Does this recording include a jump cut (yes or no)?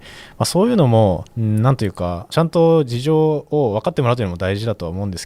yes